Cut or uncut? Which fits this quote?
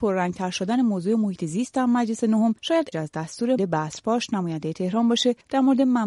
cut